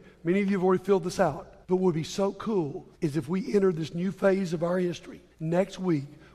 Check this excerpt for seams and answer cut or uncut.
cut